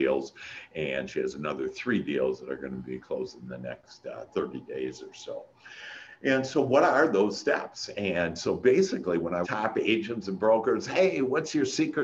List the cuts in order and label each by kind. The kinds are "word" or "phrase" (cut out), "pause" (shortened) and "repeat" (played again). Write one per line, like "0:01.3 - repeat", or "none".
0:09.4 - phrase